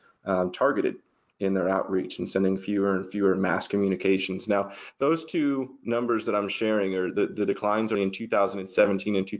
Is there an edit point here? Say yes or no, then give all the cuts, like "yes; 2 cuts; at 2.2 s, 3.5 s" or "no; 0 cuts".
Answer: yes; 1 cut; at 7.9 s